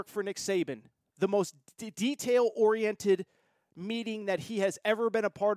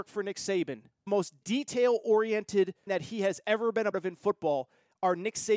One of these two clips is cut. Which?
second; 4 cuts; at 1.1 s, 1.4 s, 2.9 s, 3.9 s

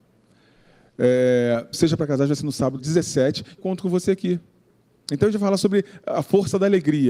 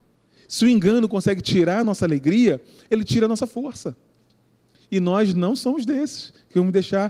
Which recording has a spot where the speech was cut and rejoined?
first; 3 cuts; at 1.7 s, 2.8 s, 3.6 s

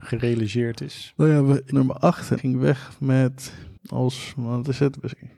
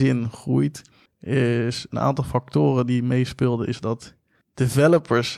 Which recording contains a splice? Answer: first; 3 cuts; at 1.7 s, 2.4 s, 3.8 s

